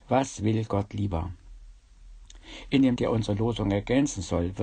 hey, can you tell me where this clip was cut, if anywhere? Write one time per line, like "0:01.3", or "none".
0:03.0